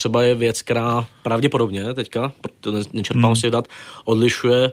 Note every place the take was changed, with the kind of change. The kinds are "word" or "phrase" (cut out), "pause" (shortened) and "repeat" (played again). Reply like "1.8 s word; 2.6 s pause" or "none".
none